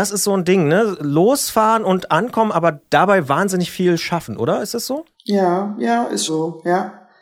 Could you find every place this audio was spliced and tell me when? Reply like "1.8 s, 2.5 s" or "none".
6.3 s